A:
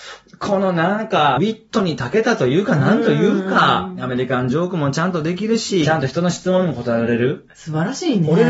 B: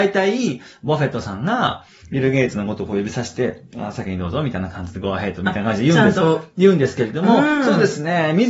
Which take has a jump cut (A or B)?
A